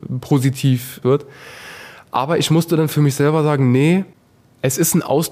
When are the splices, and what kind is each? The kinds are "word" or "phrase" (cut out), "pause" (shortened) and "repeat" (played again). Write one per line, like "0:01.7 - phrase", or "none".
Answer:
0:01.0 - word